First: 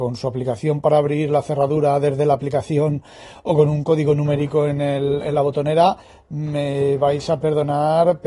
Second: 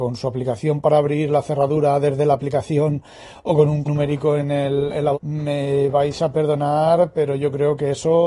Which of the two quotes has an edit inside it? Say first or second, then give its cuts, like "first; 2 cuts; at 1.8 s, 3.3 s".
second; 2 cuts; at 3.8 s, 5.1 s